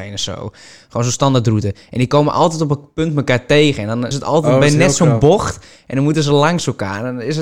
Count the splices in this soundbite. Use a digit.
1